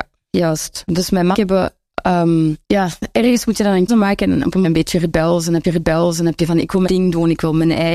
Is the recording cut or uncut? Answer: cut